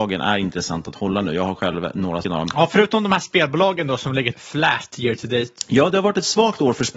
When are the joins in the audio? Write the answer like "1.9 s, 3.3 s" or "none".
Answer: 2.2 s, 4.3 s